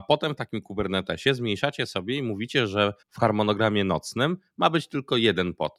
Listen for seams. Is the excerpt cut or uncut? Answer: cut